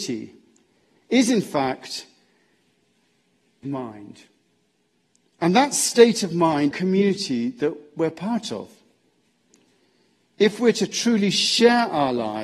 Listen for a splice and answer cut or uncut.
cut